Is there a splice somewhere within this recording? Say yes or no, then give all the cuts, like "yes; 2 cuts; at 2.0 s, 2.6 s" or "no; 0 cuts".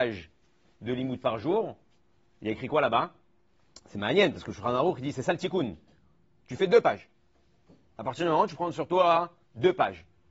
no; 0 cuts